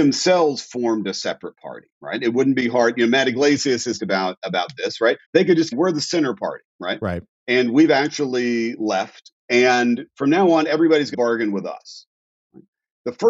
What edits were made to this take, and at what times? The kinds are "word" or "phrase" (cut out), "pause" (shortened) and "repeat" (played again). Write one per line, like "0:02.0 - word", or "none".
0:01.9 - pause
0:04.0 - word
0:04.4 - word
0:05.2 - pause
0:05.7 - phrase
0:06.7 - pause
0:09.4 - word
0:11.1 - word